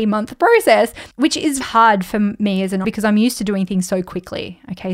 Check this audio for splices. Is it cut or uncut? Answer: cut